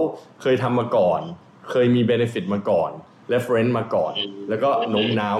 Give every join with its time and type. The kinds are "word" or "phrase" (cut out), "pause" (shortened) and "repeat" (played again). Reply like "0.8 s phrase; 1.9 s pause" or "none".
none